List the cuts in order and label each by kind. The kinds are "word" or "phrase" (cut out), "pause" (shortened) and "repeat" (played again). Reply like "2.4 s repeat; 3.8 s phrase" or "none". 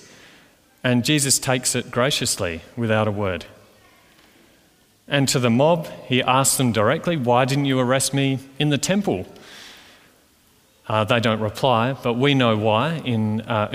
none

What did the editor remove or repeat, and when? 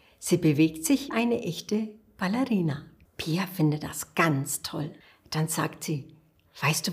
1.1 s word; 3.0 s pause; 5.0 s pause

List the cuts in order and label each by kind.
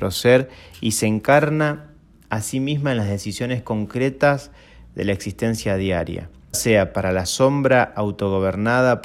6.5 s word

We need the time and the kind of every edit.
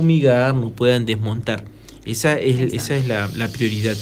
2.7 s word

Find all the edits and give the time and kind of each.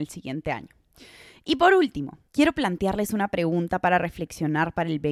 2.3 s pause

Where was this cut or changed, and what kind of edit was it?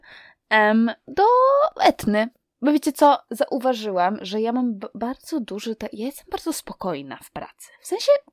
none

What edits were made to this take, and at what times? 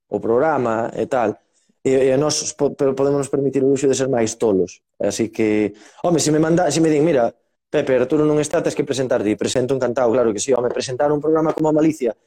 none

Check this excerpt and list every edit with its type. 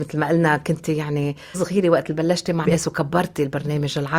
1.5 s word; 2.6 s word

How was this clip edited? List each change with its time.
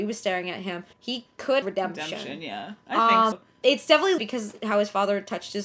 0.9 s pause; 1.6 s word; 3.3 s word; 4.2 s phrase

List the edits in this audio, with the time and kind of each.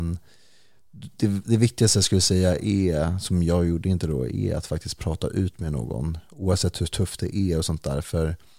none

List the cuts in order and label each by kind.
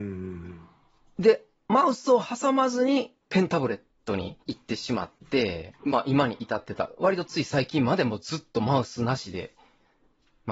3.2 s pause; 4.4 s pause; 5.8 s pause

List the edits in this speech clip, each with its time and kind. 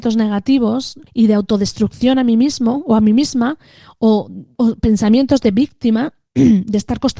1.1 s pause; 4.5 s word

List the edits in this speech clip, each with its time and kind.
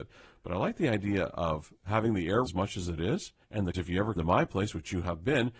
1.8 s pause; 2.4 s word; 3.4 s pause; 3.7 s phrase; 4.2 s word

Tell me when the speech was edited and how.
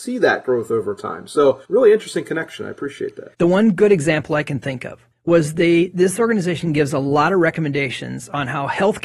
1.6 s pause; 3.3 s pause; 5.1 s pause

